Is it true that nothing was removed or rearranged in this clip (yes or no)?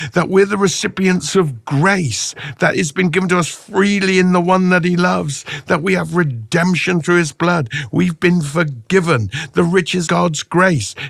no